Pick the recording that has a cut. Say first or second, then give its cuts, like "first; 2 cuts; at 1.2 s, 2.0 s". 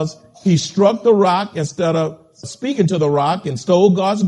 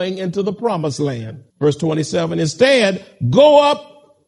second; 1 cut; at 1.5 s